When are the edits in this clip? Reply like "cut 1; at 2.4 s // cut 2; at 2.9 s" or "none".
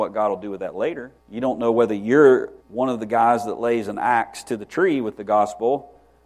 cut 1; at 1.2 s // cut 2; at 2.6 s